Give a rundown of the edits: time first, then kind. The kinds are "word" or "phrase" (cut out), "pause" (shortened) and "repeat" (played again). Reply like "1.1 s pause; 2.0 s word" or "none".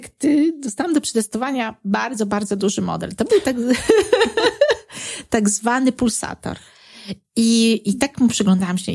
none